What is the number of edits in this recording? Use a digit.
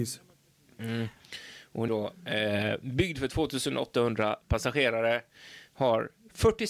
1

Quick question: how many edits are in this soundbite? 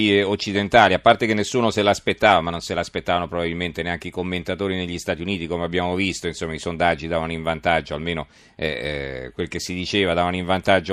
1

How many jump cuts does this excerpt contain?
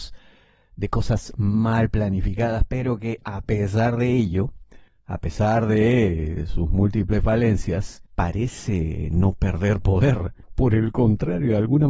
3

